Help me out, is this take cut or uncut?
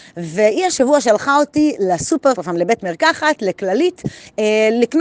cut